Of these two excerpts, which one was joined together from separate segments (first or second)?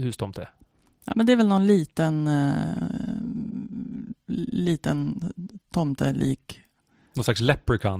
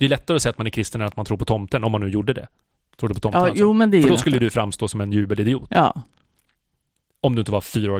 first